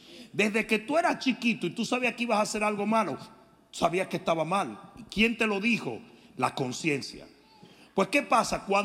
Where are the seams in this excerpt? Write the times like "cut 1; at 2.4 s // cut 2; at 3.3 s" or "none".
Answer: none